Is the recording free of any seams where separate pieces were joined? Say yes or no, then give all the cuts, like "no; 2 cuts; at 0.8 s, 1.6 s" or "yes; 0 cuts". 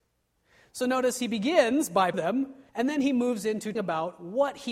no; 3 cuts; at 2.1 s, 2.7 s, 3.7 s